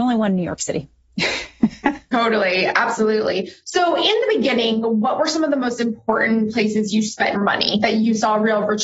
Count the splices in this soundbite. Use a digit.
1